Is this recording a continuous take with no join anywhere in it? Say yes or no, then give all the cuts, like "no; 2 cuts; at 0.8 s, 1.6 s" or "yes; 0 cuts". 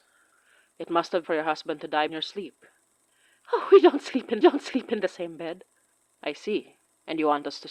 no; 3 cuts; at 1.2 s, 2.1 s, 4.4 s